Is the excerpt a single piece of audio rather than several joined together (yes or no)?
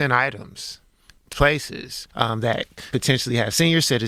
no